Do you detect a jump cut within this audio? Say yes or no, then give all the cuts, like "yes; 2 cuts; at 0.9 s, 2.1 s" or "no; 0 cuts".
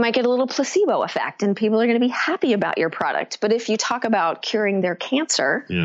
no; 0 cuts